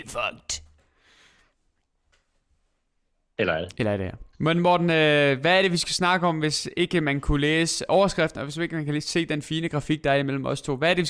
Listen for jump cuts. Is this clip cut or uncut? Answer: cut